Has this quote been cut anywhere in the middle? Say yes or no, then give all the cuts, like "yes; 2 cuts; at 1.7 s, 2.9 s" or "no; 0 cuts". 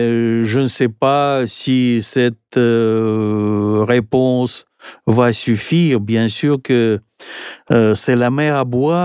no; 0 cuts